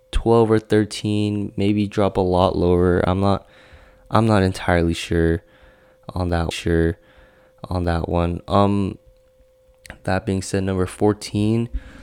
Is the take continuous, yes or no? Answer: no